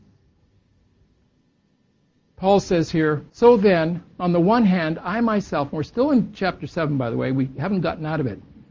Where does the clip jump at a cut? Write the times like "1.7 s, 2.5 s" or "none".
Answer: 3.3 s